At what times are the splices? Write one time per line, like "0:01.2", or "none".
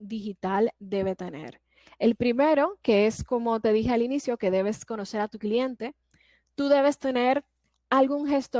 none